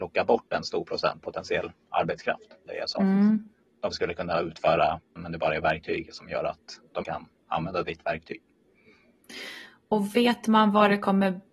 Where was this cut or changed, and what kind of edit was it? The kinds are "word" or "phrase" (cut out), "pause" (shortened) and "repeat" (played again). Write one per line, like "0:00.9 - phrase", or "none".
0:01.2 - word
0:02.7 - word
0:03.9 - word
0:05.2 - word
0:07.0 - word

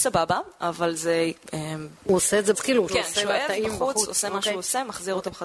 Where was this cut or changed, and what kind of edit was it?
0:02.5 - word
0:02.9 - word

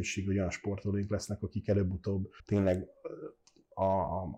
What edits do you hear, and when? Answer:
0:02.4 - pause

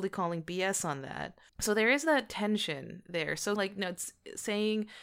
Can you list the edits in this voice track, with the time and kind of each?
0:01.5 - pause
0:03.6 - word

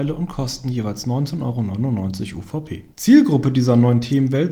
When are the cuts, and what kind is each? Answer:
0:02.9 - pause

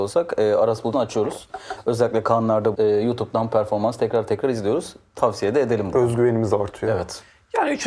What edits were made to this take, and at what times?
0:00.9 - phrase
0:02.7 - word

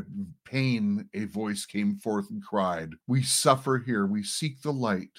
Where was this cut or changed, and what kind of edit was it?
0:03.0 - pause

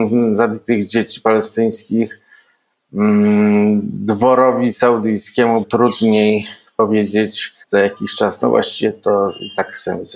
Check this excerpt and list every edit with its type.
0:05.6 - word
0:07.6 - pause

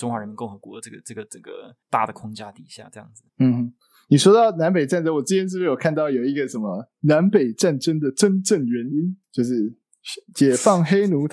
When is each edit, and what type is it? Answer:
0:09.2 - pause

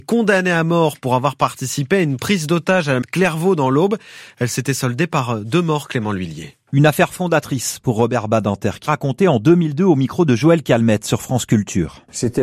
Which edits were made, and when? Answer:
0:03.0 - phrase
0:08.9 - word

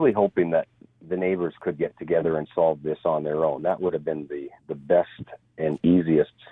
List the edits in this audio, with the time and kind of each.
0:04.6 - pause

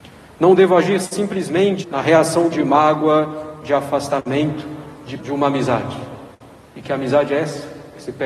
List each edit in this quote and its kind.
0:01.8 - word
0:02.5 - phrase
0:05.2 - word

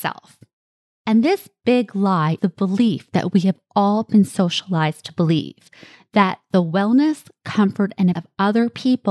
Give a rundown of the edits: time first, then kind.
0:02.4 - word
0:08.1 - word

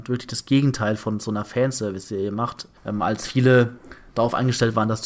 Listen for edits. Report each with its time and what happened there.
0:02.8 - pause

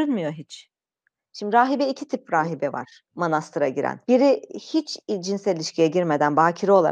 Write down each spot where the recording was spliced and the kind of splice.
0:03.1 - pause
0:04.0 - pause

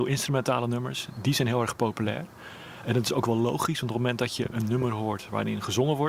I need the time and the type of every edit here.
none

